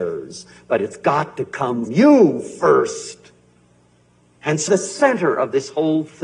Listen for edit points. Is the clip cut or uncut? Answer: cut